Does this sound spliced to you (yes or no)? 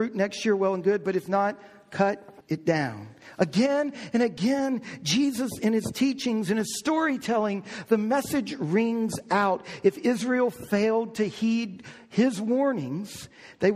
yes